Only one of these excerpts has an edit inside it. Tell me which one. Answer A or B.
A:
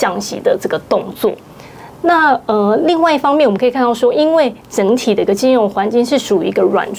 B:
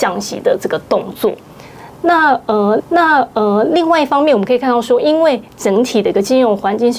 B